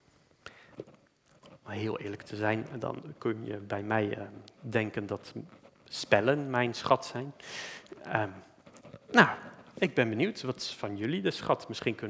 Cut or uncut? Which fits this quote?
uncut